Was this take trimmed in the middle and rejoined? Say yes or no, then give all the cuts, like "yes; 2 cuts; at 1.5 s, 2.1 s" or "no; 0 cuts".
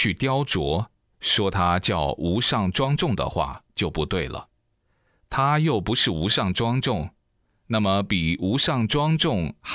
no; 0 cuts